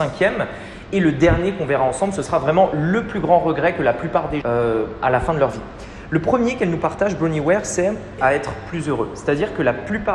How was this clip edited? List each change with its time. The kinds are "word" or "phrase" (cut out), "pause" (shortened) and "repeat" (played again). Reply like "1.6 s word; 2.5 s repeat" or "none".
4.4 s phrase; 8.2 s word